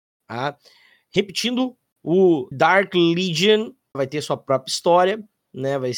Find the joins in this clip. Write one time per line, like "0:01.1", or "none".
0:02.5
0:03.9